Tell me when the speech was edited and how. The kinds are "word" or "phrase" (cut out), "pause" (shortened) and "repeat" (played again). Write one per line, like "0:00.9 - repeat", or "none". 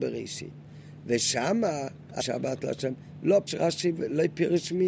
0:02.2 - word
0:03.5 - word